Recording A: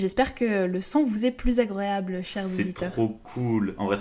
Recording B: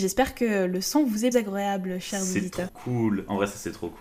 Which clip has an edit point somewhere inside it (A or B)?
B